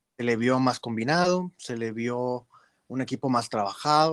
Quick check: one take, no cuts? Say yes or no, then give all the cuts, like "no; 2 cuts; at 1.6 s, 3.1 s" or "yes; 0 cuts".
yes; 0 cuts